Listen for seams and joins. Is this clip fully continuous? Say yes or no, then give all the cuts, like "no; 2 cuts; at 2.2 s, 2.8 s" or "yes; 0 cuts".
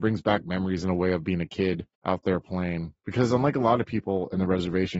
no; 1 cut; at 1.9 s